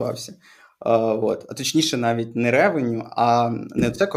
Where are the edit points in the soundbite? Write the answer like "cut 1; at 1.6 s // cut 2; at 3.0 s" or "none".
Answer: none